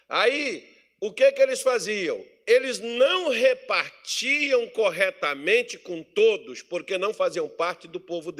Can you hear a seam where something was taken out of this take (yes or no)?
no